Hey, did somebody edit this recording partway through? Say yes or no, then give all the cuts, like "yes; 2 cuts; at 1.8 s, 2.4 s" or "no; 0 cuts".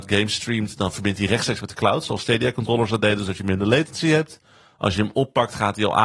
no; 0 cuts